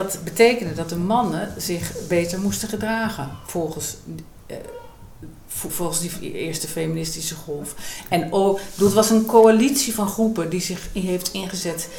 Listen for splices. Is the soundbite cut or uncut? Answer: cut